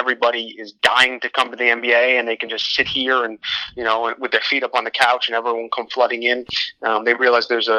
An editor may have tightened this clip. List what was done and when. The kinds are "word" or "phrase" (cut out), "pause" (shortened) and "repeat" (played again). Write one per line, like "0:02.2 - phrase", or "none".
none